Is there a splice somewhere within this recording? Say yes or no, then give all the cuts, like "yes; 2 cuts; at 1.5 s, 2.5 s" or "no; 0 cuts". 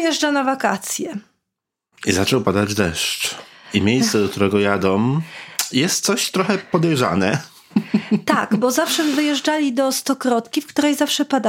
no; 0 cuts